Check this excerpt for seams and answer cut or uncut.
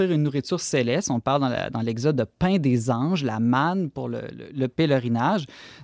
uncut